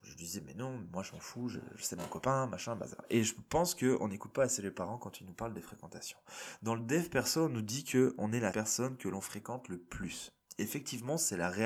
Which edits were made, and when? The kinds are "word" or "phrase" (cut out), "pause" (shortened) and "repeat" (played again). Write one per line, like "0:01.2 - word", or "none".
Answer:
0:08.5 - phrase